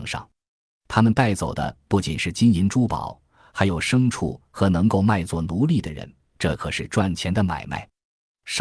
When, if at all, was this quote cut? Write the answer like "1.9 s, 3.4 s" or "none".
none